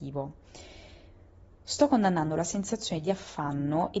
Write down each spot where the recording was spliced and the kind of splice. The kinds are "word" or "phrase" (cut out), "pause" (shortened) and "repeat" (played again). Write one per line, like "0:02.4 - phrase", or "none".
none

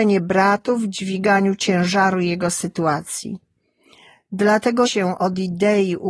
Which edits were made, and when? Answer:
0:04.9 - phrase

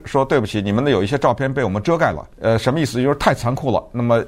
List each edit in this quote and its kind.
0:02.3 - pause

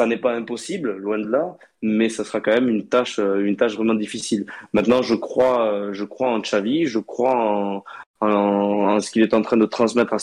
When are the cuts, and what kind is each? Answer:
none

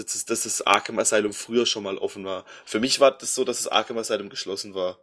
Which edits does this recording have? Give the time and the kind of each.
none

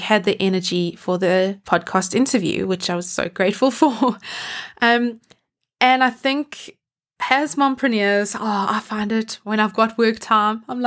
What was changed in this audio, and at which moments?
none

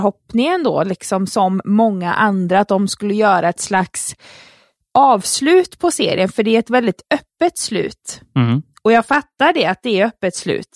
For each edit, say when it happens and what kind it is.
none

